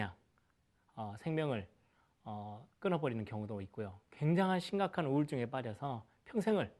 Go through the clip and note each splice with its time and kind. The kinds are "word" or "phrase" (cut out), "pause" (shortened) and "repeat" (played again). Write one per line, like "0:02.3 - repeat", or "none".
0:02.7 - pause